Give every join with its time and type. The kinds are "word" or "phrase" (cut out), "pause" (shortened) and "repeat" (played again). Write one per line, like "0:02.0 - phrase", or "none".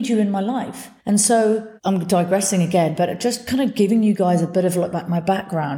0:01.0 - pause
0:01.8 - pause